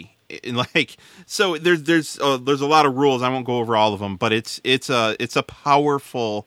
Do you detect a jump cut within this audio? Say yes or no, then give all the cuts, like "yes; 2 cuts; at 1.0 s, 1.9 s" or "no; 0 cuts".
no; 0 cuts